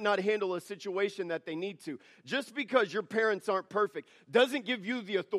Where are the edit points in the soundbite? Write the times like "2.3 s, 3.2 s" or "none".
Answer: none

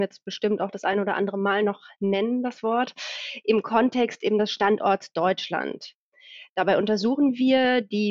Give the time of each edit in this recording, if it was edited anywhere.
none

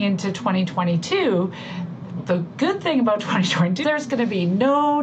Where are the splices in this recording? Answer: 2.2 s, 3.8 s

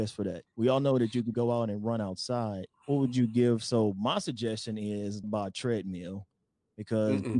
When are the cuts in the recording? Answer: 1.3 s, 2.7 s, 5.2 s

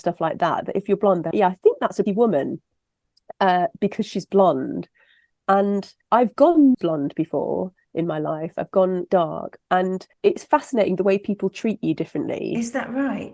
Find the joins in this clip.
1.3 s, 2.1 s, 6.0 s, 6.7 s, 9.1 s, 10.1 s

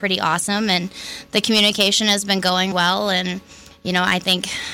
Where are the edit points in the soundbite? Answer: 2.7 s

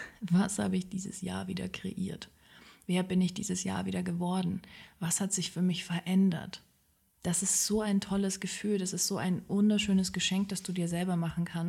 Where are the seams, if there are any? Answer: none

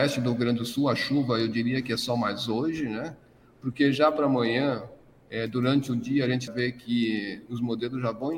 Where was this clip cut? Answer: 6.5 s

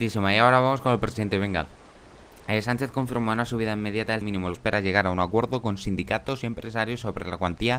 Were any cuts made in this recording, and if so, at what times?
4.2 s, 4.5 s

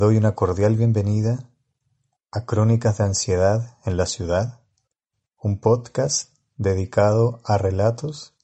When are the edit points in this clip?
none

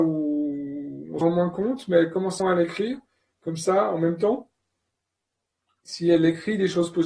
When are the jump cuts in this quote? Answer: 1.2 s, 2.4 s

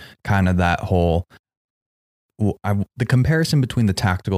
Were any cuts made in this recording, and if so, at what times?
2.9 s

